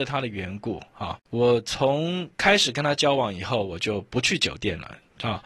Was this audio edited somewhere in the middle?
yes; 2 cuts; at 1.3 s, 2.3 s

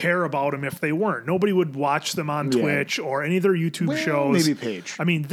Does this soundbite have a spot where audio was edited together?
no; 0 cuts

